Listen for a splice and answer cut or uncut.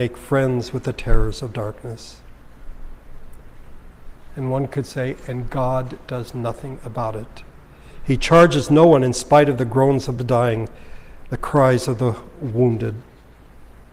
uncut